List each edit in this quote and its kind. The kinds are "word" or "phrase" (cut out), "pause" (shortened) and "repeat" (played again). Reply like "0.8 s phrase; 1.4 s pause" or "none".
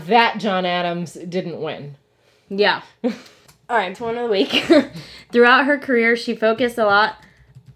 3.9 s word